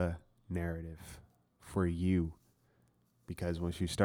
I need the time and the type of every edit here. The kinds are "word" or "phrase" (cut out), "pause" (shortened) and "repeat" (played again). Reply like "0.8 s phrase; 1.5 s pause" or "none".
none